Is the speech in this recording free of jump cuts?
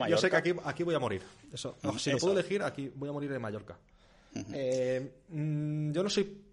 yes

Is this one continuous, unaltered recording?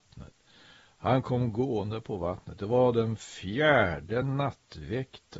yes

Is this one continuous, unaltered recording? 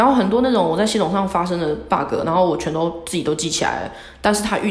yes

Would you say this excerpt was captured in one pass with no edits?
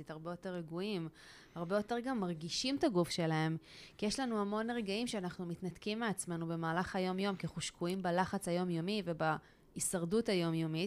yes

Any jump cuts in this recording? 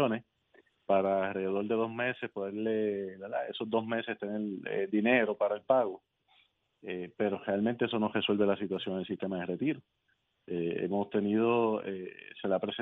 no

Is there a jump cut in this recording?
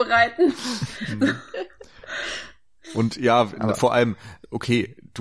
no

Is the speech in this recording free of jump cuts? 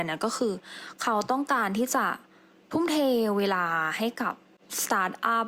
yes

